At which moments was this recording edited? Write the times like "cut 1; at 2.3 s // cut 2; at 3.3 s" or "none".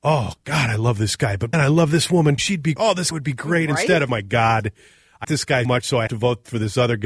cut 1; at 1.5 s // cut 2; at 2.4 s // cut 3; at 2.8 s // cut 4; at 3.1 s // cut 5; at 4.1 s // cut 6; at 5.2 s // cut 7; at 5.6 s // cut 8; at 6.1 s